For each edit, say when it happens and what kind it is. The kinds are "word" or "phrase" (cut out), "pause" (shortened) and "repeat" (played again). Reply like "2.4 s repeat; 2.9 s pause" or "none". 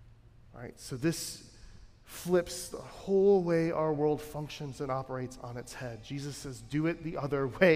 none